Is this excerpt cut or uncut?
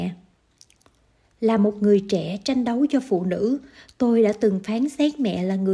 uncut